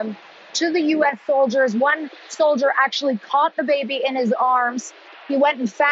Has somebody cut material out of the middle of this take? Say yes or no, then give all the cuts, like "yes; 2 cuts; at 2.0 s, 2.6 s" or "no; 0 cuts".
no; 0 cuts